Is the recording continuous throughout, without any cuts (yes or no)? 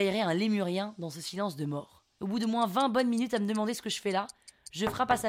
yes